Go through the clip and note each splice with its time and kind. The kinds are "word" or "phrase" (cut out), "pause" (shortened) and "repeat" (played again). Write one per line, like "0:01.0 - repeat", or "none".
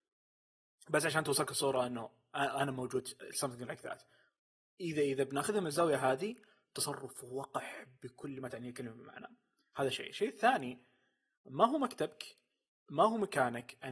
none

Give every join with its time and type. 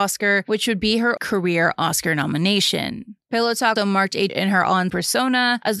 0:01.2 - word
0:03.8 - word
0:04.3 - word
0:04.9 - word

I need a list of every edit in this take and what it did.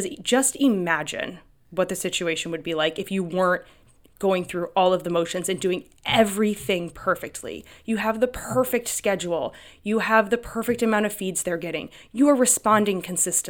none

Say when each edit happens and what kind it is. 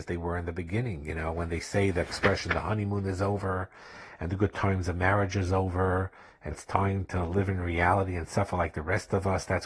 0:06.5 - word

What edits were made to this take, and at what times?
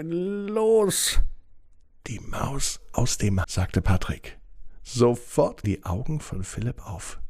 0:02.9 - word
0:03.4 - word
0:05.6 - word

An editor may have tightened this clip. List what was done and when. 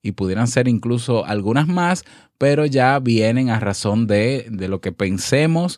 none

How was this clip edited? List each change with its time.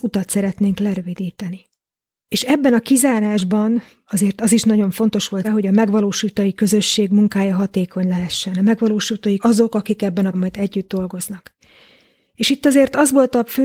0:05.4 - word
0:09.4 - word
0:10.3 - word

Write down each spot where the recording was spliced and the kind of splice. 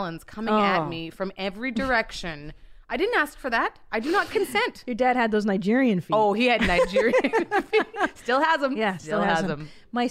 none

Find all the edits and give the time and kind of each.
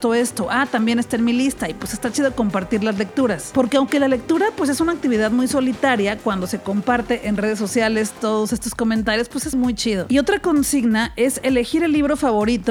0:09.5 - word

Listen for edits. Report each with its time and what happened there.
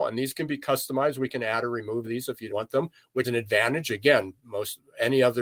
0:02.0 - word
0:02.5 - word
0:03.2 - word

